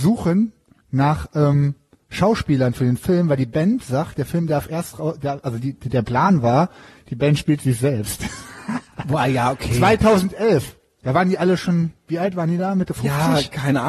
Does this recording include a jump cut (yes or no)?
no